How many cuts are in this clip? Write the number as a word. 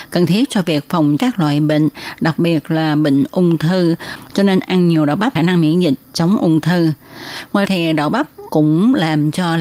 three